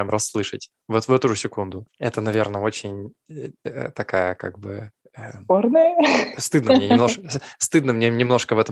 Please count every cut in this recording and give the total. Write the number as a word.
one